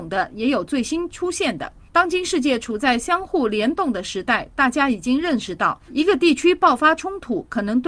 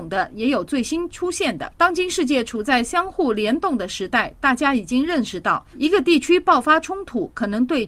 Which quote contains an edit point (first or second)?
second